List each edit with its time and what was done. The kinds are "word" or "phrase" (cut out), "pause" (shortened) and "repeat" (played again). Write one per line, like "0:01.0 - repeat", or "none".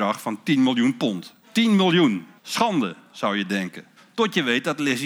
0:01.4 - pause
0:02.4 - pause
0:04.0 - pause